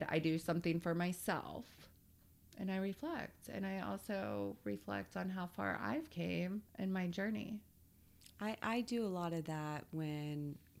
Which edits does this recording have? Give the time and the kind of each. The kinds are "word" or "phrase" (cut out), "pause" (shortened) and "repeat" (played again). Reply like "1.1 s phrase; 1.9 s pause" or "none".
6.7 s pause